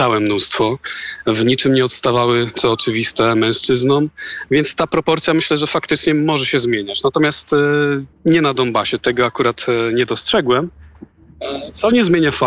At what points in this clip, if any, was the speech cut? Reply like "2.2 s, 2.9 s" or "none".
8.1 s